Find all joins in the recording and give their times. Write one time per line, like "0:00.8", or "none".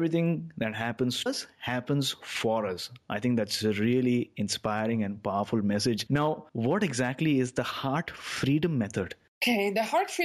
0:01.3